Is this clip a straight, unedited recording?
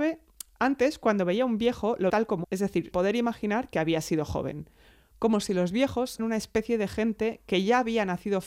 no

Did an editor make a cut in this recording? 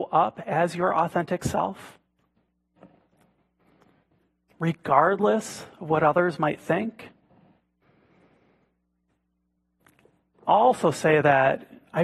no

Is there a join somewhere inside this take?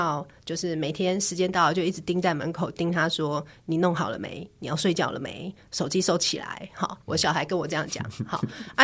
yes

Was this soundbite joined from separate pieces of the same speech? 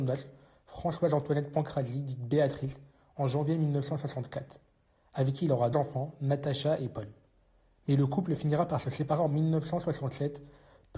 yes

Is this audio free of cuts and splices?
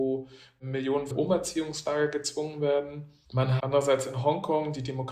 no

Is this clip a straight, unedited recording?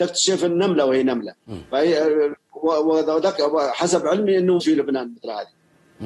no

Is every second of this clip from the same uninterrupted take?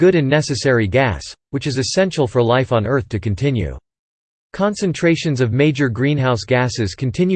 yes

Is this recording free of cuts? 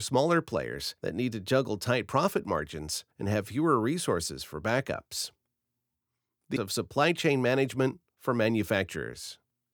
no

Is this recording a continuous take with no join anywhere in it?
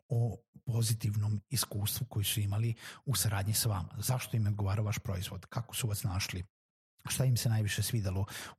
yes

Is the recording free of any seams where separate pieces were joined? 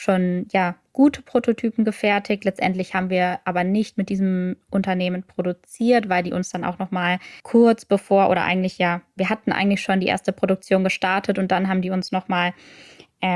no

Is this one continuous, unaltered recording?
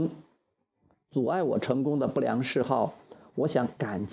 yes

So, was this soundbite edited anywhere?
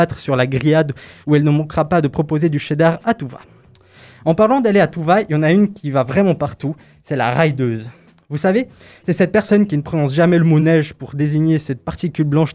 no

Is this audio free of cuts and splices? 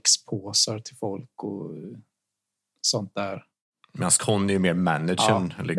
yes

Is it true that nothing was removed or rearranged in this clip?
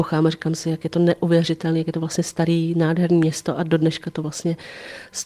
yes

